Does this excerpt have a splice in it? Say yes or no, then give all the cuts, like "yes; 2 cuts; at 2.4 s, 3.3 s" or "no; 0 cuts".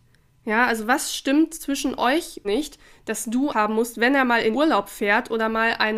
yes; 3 cuts; at 2.4 s, 3.5 s, 4.5 s